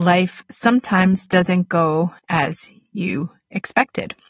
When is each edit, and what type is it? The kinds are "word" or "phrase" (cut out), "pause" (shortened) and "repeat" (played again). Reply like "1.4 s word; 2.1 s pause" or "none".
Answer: 2.2 s pause